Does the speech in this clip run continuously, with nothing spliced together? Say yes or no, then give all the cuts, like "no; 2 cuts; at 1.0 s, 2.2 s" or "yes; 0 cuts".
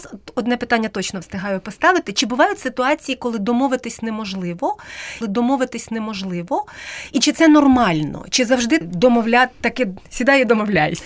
no; 2 cuts; at 5.2 s, 8.8 s